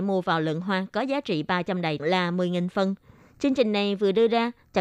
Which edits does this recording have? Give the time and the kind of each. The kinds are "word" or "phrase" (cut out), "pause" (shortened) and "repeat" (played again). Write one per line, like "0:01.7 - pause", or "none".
0:02.0 - phrase